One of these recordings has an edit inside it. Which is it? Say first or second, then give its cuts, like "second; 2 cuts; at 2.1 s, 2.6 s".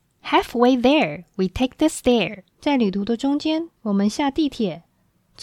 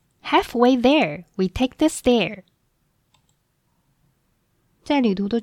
first; 1 cut; at 2.5 s